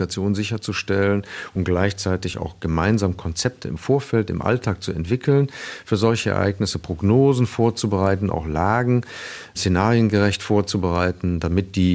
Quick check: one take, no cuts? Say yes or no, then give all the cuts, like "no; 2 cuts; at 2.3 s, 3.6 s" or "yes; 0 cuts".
yes; 0 cuts